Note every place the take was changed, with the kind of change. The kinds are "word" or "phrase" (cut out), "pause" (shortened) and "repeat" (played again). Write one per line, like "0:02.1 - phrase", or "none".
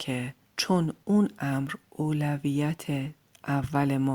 none